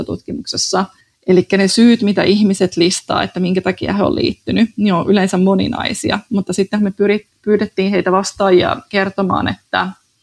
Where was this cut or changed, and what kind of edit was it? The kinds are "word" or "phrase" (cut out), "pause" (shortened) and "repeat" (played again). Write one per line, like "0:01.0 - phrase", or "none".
0:01.0 - pause